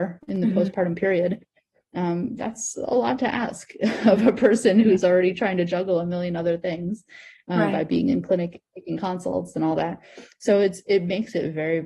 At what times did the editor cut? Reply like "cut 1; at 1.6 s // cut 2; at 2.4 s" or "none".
none